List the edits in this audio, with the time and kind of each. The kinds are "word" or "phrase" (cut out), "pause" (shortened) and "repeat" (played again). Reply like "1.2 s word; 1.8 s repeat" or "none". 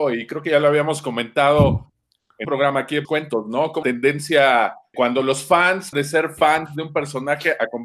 2.4 s word; 3.0 s word; 3.8 s word; 4.9 s word; 5.9 s word